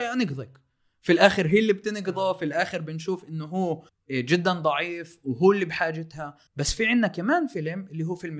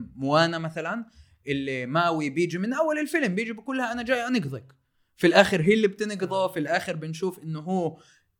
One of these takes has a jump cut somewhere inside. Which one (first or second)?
first